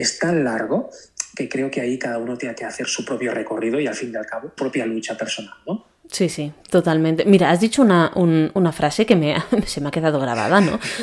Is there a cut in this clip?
yes; 2 cuts; at 4.6 s, 6.0 s

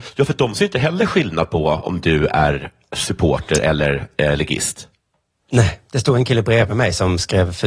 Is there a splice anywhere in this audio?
no; 0 cuts

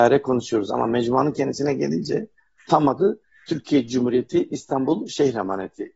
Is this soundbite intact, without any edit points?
yes; 0 cuts

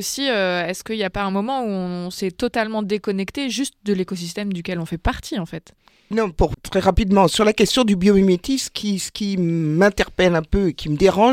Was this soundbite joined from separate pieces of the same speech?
yes; 2 cuts; at 6.1 s, 6.5 s

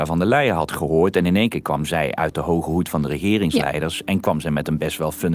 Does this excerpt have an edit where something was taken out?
no; 0 cuts

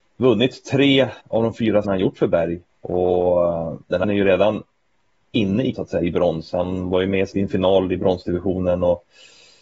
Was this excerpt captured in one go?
no; 6 cuts; at 1.2 s, 1.8 s, 2.7 s, 4.0 s, 5.7 s, 7.3 s

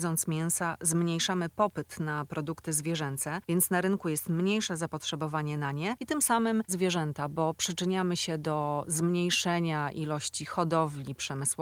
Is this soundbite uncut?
no; 1 cut; at 6.7 s

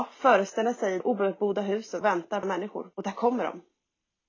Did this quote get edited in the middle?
yes; 4 cuts; at 1.0 s, 2.0 s, 2.4 s, 2.9 s

